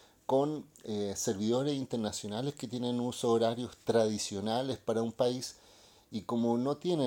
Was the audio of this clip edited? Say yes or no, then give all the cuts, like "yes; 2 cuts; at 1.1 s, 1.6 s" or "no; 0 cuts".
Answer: no; 0 cuts